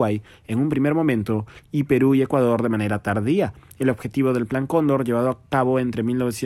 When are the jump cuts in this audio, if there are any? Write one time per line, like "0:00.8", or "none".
none